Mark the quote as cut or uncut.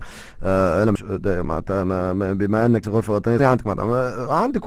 cut